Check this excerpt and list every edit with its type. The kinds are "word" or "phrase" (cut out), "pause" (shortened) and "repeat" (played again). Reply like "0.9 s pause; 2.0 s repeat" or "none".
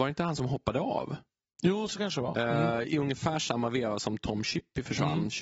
none